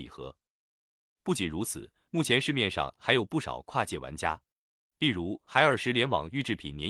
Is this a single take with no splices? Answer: yes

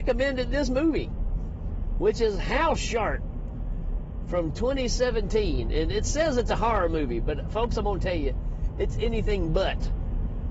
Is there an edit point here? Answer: no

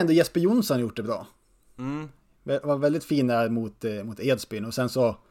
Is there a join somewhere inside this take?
no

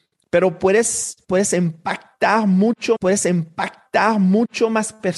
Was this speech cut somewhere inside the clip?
yes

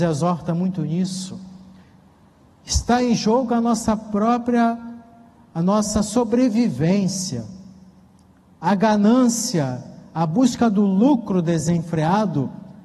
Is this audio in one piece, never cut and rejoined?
yes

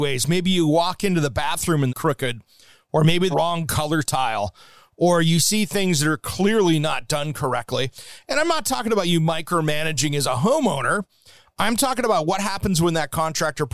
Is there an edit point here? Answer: yes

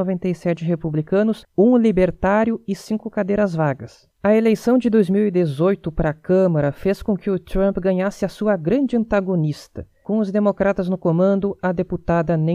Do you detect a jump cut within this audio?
no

